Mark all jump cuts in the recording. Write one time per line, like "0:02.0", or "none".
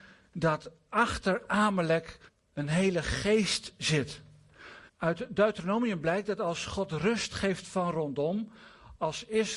0:02.3
0:04.9